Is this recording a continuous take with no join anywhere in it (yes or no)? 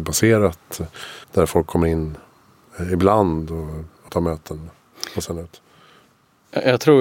no